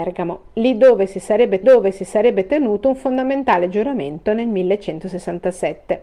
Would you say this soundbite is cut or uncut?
cut